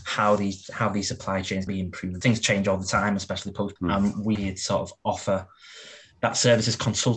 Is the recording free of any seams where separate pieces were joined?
no; 4 cuts; at 1.7 s, 2.2 s, 3.8 s, 4.4 s

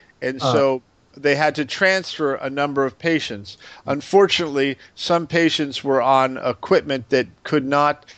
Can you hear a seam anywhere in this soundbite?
no; 0 cuts

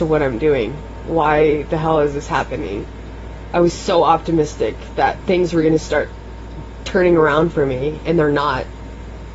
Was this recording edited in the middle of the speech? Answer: no; 0 cuts

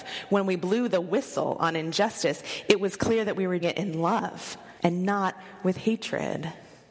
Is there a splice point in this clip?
yes; 2 cuts; at 3.6 s, 4.8 s

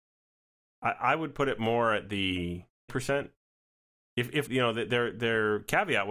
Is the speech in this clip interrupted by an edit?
yes; 2 cuts; at 2.9 s, 4.5 s

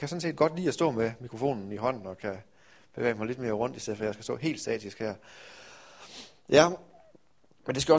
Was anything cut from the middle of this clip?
no; 0 cuts

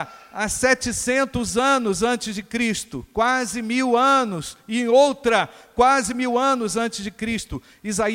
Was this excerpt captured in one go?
yes; 0 cuts

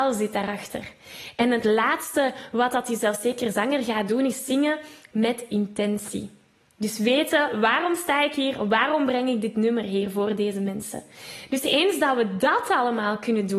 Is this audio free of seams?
yes; 0 cuts

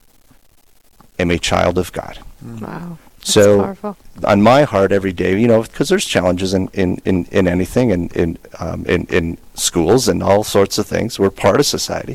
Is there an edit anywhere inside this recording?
yes; 2 cuts; at 3.1 s, 9.5 s

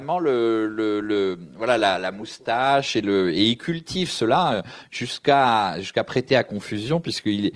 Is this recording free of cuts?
yes; 0 cuts

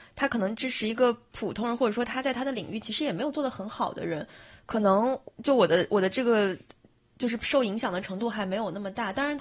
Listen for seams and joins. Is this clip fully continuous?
no; 1 cut; at 5.3 s

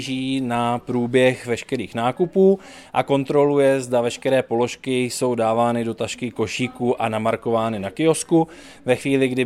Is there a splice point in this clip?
no; 0 cuts

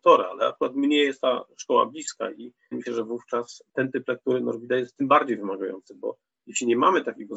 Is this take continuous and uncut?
no; 1 cut; at 2.7 s

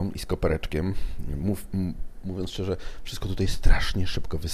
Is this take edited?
no; 0 cuts

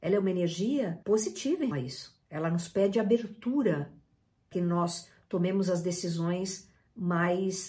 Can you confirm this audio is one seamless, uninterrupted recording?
no; 4 cuts; at 1.0 s, 1.7 s, 2.2 s, 4.5 s

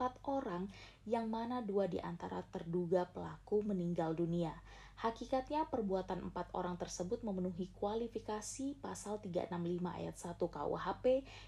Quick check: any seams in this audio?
no; 0 cuts

